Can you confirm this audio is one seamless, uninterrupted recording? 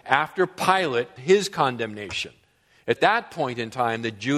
no; 2 cuts; at 1.2 s, 3.0 s

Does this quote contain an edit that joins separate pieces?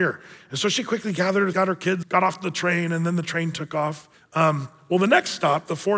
yes; 3 cuts; at 1.5 s, 2.0 s, 4.1 s

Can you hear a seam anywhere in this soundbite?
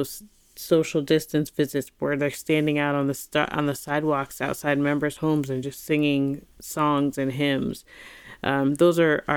no; 0 cuts

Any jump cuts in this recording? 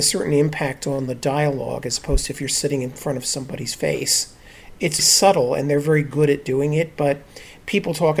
yes; 1 cut; at 5.0 s

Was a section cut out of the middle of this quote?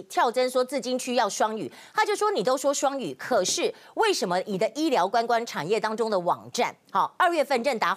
no; 0 cuts

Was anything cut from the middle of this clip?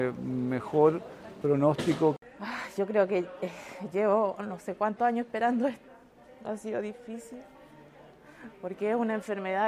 no; 0 cuts

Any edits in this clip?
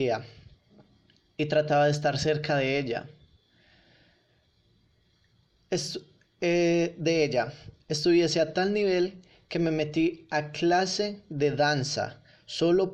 no; 0 cuts

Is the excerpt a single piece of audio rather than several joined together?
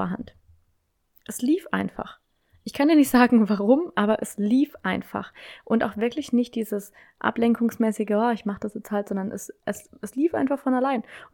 yes; 0 cuts

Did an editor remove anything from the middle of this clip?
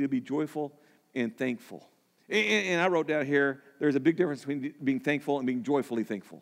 yes; 1 cut; at 2.2 s

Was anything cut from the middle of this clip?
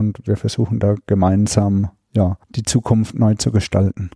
yes; 1 cut; at 2.4 s

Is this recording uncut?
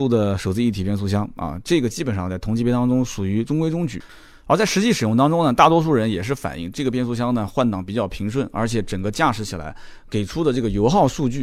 yes; 0 cuts

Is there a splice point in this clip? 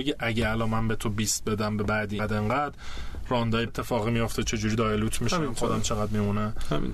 yes; 2 cuts; at 2.2 s, 3.7 s

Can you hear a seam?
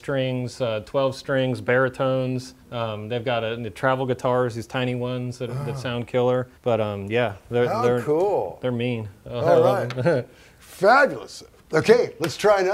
yes; 2 cuts; at 2.6 s, 6.6 s

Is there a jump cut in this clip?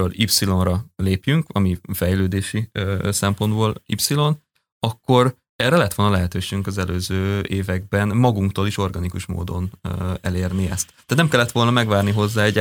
no; 0 cuts

